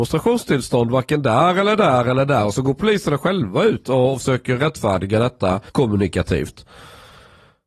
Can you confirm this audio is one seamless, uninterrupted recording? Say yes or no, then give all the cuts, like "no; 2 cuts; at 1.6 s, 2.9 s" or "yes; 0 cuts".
no; 1 cut; at 5.7 s